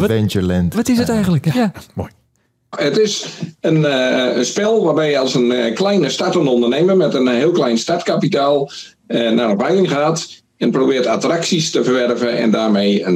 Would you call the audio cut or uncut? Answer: uncut